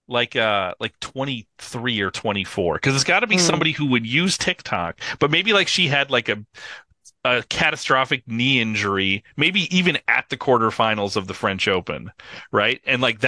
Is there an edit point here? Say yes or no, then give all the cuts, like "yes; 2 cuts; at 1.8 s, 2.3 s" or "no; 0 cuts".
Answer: no; 0 cuts